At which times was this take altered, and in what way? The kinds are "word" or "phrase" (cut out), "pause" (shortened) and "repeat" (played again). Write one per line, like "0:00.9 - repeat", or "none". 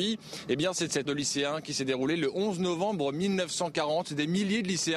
0:01.1 - word

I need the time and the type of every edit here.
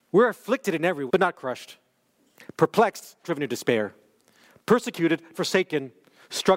0:01.1 - word
0:03.2 - word
0:05.3 - word

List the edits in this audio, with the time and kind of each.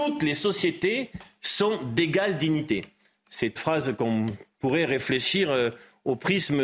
0:03.6 - phrase

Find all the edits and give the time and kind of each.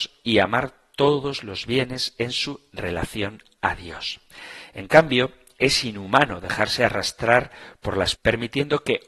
0:08.2 - word

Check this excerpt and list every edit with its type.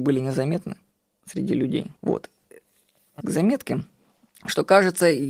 0:00.9 - pause
0:02.0 - pause
0:03.2 - word
0:04.3 - pause

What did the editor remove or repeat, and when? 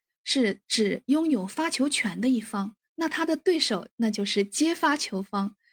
0:02.8 - pause

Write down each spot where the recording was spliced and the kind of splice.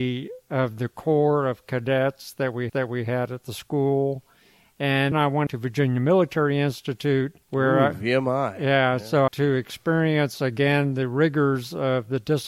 0:02.7 - repeat
0:05.1 - word
0:05.5 - word
0:07.4 - pause
0:09.3 - phrase

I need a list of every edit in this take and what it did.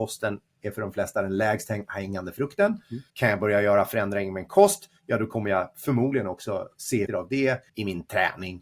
0:03.1 - pause
0:07.1 - word
0:07.7 - pause

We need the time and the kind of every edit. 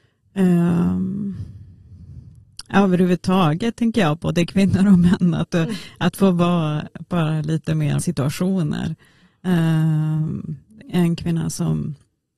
0:08.0 - phrase
0:10.8 - word

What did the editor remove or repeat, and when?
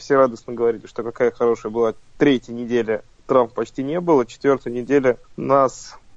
none

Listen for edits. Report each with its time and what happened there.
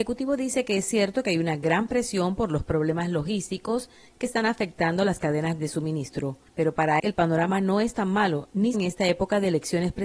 0:05.6 - word
0:06.5 - pause
0:07.0 - word
0:08.7 - word

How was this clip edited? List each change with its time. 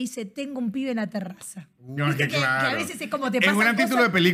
none

